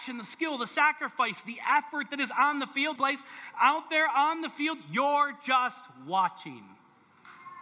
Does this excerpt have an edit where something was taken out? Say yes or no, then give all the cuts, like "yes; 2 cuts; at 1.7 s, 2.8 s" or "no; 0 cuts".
yes; 1 cut; at 3.0 s